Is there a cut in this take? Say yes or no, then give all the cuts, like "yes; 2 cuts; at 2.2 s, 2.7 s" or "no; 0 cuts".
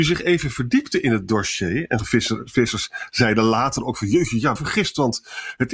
yes; 2 cuts; at 2.0 s, 4.6 s